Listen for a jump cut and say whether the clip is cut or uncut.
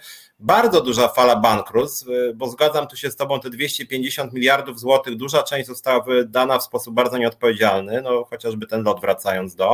uncut